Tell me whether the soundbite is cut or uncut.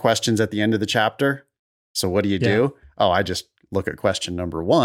uncut